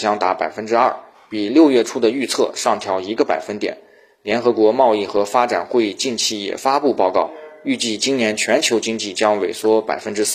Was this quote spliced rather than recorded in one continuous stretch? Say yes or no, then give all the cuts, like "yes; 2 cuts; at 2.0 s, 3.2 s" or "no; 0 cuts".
no; 0 cuts